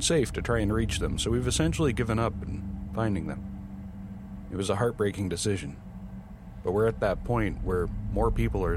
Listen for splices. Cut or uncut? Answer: uncut